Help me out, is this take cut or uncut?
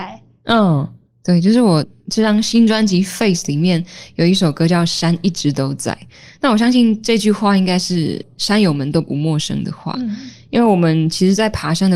uncut